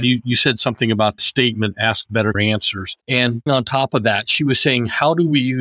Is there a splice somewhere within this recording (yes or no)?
yes